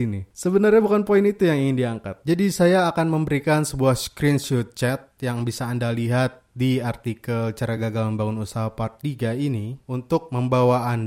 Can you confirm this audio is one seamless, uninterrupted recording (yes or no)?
yes